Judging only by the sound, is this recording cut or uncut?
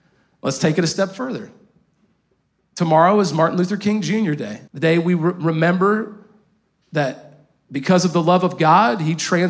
cut